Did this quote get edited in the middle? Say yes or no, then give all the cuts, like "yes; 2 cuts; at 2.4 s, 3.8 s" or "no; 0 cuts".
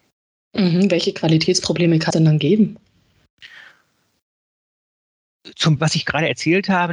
yes; 2 cuts; at 2.1 s, 5.8 s